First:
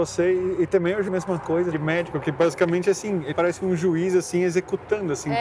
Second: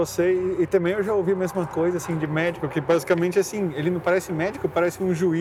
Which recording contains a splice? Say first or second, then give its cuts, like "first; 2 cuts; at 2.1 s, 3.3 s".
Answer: first; 3 cuts; at 1.1 s, 1.7 s, 3.3 s